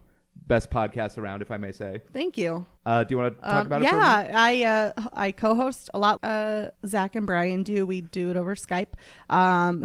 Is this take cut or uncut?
cut